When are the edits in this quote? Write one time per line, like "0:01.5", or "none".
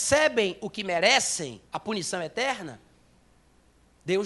0:01.7